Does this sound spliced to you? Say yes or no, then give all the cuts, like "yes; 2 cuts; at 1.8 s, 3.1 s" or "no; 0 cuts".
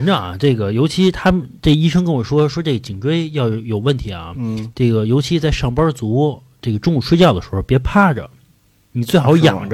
no; 0 cuts